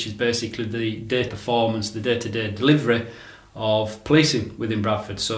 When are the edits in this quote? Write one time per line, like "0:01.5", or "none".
0:01.3

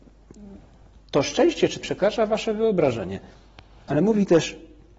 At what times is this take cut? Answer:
0:01.8

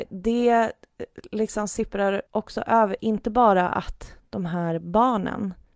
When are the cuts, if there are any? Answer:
0:02.3

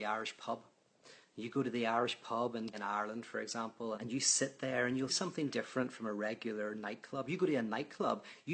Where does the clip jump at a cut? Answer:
0:02.7
0:03.9
0:05.1
0:05.5

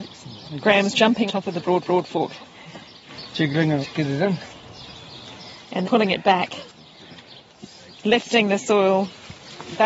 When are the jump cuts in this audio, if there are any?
0:01.3
0:01.8
0:03.8
0:05.8

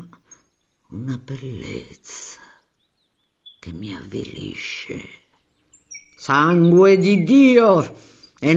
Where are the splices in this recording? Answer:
none

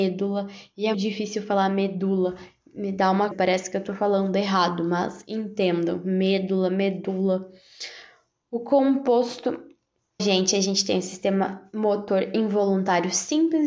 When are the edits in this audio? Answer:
0:00.9
0:03.3
0:10.2

